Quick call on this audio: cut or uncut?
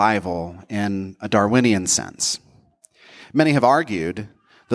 uncut